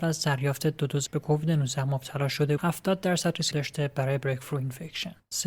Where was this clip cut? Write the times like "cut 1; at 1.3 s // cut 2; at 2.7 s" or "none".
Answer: cut 1; at 1.1 s // cut 2; at 2.6 s // cut 3; at 3.5 s